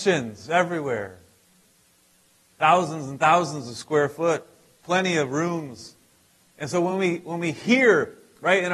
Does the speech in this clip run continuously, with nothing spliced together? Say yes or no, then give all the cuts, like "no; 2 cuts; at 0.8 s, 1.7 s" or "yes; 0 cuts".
yes; 0 cuts